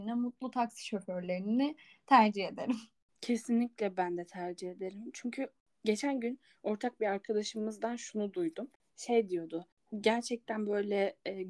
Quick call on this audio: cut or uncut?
uncut